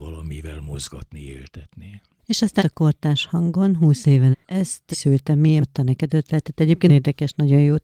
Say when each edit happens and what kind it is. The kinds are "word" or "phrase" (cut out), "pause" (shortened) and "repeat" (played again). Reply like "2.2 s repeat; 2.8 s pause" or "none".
2.6 s word; 4.3 s word; 4.9 s word; 5.6 s word; 6.1 s word; 6.9 s word